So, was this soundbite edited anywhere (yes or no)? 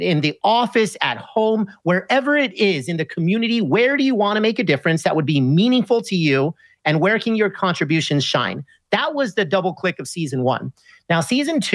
no